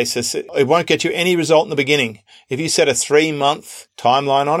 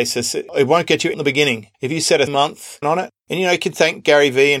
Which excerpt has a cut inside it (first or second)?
second